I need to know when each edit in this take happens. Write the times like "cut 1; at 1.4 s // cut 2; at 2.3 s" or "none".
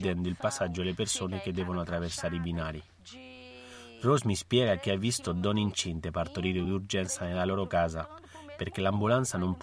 none